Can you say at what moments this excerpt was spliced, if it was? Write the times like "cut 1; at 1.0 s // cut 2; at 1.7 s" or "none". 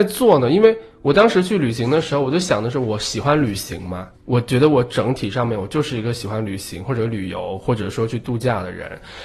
cut 1; at 4.1 s